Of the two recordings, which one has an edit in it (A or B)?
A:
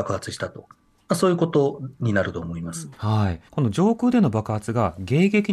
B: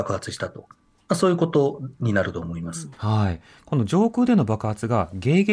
A